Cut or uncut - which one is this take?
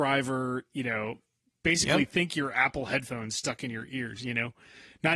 uncut